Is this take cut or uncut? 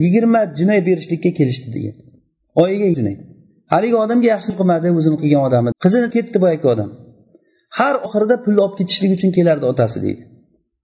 cut